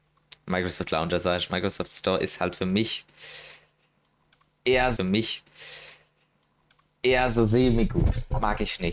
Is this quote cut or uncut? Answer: cut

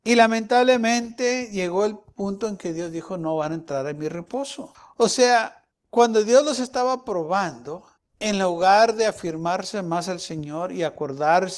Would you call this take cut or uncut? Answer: uncut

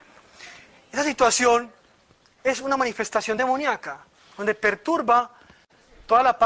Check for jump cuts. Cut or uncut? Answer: uncut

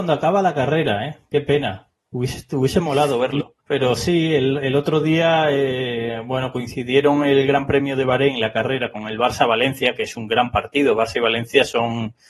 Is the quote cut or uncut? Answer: cut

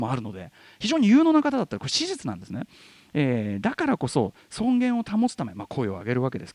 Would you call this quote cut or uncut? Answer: uncut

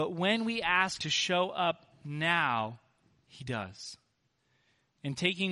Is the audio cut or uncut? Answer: cut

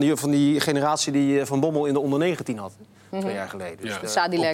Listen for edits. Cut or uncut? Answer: uncut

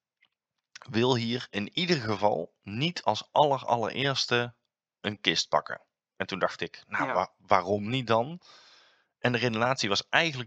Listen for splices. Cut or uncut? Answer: uncut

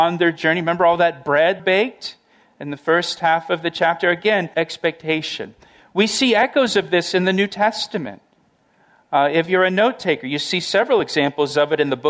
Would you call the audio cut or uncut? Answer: cut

